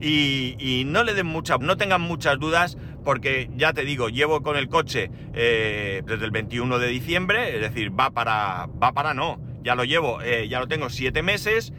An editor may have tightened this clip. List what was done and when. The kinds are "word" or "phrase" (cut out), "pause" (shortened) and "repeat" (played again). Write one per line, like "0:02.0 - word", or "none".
0:01.6 - word
0:06.1 - word